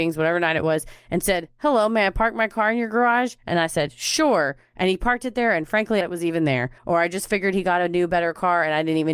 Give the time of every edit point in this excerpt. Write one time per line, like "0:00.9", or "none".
0:06.0
0:06.8